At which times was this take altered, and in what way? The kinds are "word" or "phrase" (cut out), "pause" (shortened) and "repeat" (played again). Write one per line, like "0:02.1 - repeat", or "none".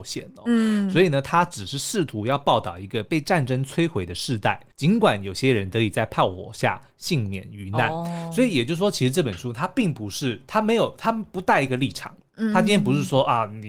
0:04.7 - pause